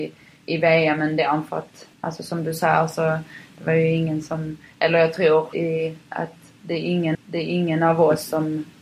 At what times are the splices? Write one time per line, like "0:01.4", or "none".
0:01.9
0:05.5
0:07.1